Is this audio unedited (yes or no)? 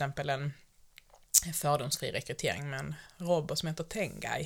yes